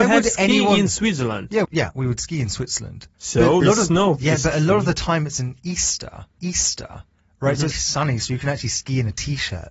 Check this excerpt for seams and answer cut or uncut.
cut